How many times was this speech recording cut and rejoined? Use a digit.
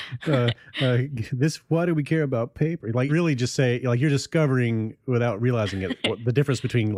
1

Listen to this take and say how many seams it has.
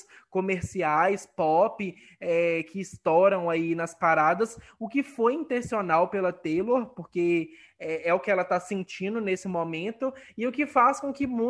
0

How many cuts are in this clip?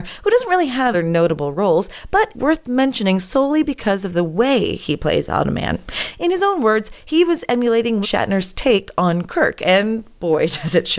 3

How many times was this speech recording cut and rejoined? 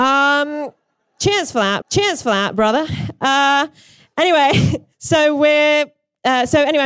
2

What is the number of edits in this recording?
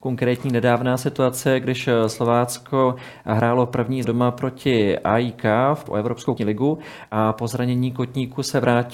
3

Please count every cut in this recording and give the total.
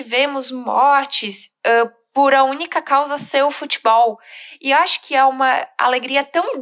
0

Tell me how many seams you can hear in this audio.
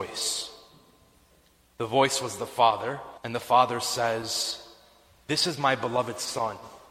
1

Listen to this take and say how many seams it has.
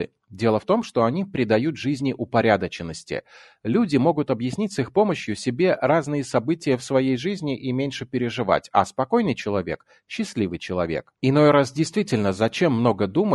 1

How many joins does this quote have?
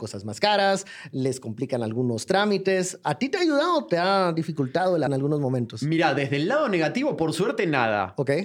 1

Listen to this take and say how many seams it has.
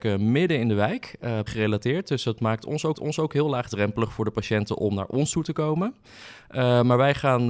2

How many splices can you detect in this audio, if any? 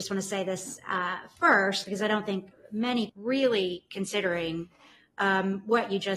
1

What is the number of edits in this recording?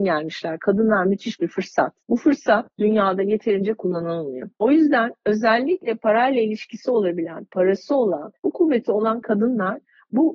3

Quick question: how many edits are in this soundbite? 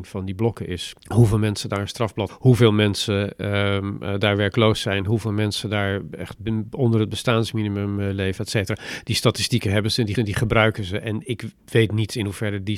4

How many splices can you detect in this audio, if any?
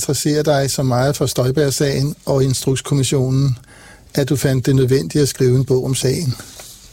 0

